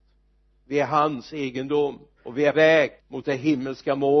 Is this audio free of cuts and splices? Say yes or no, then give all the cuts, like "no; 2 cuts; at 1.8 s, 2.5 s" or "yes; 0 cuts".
no; 3 cuts; at 2.2 s, 2.5 s, 3.0 s